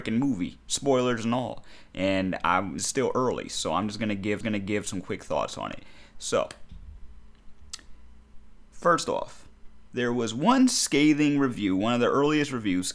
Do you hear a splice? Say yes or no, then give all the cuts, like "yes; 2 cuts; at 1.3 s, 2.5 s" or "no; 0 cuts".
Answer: yes; 2 cuts; at 2.8 s, 4.4 s